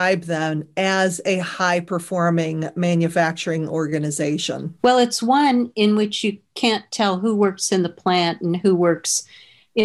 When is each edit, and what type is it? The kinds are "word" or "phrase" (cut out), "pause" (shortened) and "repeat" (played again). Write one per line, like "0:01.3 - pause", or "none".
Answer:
0:04.8 - pause